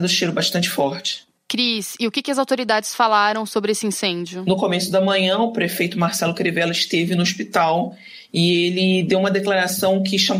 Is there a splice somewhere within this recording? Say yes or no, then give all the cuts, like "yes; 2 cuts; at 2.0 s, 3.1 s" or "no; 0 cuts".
no; 0 cuts